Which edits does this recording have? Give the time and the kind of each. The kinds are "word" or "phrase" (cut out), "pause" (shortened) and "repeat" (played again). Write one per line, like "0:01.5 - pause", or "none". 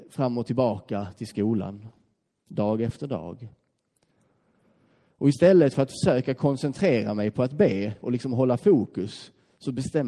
none